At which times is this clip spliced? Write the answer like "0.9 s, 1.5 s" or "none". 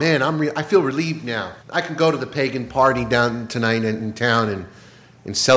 1.6 s